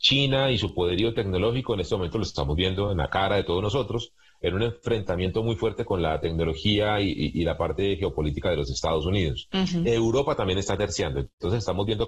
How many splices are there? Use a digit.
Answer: 0